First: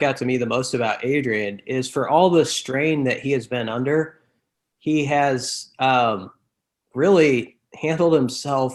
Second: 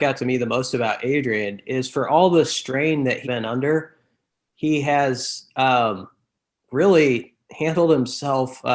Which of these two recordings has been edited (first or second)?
second